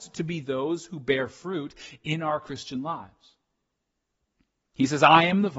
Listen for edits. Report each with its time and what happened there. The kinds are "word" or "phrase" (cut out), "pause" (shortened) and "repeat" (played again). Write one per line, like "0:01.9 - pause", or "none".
none